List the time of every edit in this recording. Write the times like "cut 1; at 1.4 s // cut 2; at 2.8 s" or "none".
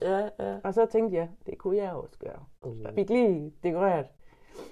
cut 1; at 2.6 s // cut 2; at 2.9 s